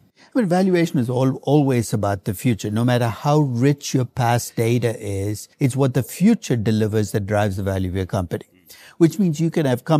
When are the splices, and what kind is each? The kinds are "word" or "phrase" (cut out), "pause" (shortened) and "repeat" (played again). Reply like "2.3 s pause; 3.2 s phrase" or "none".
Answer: 5.5 s pause